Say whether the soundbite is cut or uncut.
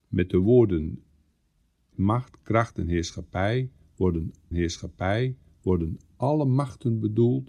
cut